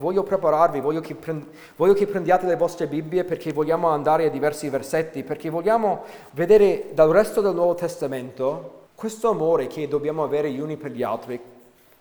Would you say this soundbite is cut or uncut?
cut